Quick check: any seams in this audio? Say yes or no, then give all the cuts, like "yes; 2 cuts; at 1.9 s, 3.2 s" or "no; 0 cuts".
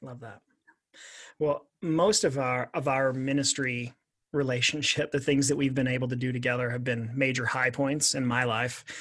no; 0 cuts